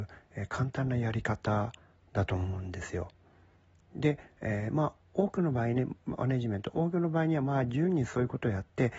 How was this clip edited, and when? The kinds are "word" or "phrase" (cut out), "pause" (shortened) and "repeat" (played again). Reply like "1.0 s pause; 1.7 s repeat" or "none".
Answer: none